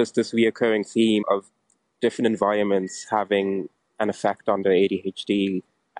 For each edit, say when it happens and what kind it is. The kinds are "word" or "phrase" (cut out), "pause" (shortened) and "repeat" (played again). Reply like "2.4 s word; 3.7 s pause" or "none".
1.2 s word